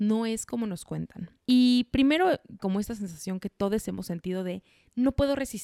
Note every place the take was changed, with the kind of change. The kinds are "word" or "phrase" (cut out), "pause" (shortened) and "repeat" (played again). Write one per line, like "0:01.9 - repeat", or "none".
0:01.4 - pause
0:02.6 - word